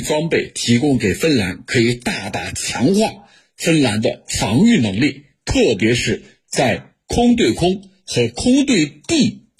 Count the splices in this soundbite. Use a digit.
0